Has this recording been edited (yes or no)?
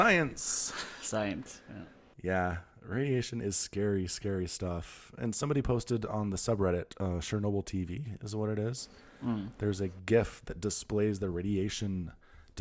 no